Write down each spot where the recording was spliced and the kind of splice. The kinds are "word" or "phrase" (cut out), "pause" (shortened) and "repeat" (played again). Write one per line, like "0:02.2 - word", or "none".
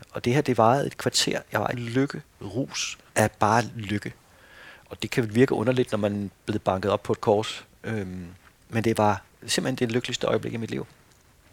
0:01.7 - word
0:03.1 - pause
0:06.4 - word